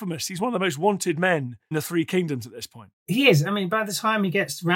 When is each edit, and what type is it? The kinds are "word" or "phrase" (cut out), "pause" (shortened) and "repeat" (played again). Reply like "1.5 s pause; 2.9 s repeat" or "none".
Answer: 1.7 s word